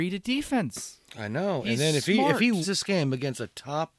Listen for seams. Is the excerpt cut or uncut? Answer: cut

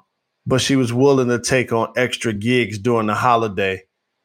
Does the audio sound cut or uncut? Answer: uncut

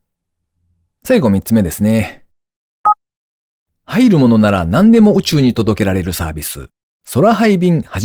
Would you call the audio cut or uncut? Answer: uncut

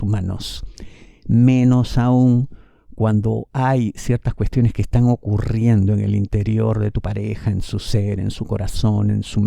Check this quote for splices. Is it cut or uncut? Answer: uncut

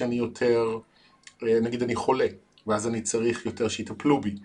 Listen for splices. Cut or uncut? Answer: uncut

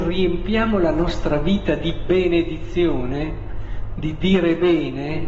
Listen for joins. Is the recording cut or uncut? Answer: uncut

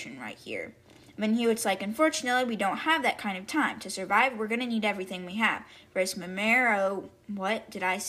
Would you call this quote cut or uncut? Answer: uncut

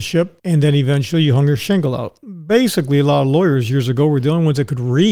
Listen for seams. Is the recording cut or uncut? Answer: uncut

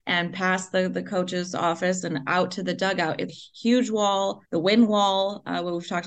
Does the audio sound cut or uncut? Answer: cut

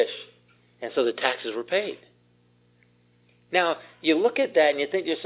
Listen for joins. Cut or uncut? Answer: uncut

